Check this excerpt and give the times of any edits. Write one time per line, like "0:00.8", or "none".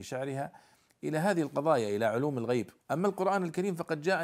0:02.8